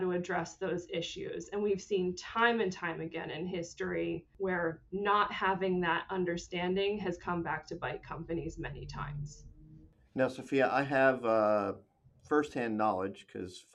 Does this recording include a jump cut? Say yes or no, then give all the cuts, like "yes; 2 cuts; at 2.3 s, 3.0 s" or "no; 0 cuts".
no; 0 cuts